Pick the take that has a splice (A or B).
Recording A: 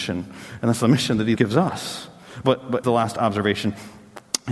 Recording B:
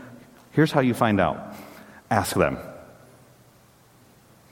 A